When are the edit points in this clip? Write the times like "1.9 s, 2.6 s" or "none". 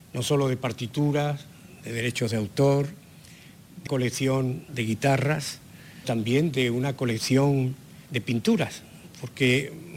3.9 s, 4.7 s, 6.0 s, 8.1 s